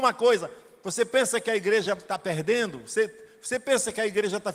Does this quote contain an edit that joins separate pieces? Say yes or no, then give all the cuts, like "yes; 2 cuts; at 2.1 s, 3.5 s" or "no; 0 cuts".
no; 0 cuts